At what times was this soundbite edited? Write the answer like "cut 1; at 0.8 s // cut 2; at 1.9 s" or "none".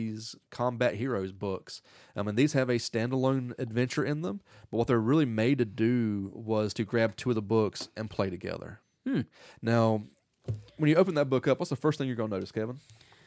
none